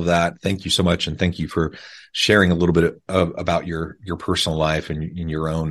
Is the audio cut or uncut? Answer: uncut